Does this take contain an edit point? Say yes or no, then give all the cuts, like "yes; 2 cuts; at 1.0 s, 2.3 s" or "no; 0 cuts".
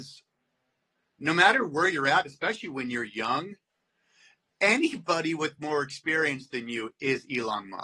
no; 0 cuts